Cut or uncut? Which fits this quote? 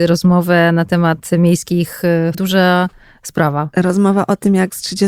cut